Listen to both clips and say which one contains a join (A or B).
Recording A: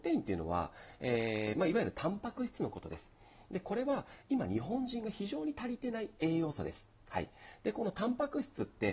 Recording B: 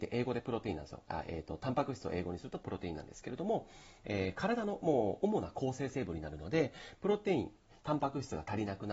A